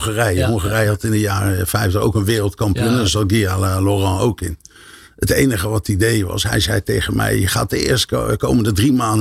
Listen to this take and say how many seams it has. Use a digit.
0